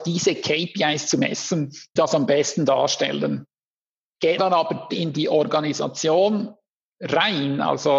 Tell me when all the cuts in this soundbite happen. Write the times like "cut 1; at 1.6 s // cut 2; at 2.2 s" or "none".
cut 1; at 2.0 s // cut 2; at 4.4 s // cut 3; at 4.9 s